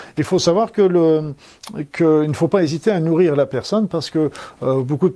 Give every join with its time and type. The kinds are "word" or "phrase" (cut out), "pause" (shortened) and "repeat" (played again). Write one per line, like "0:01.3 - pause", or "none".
none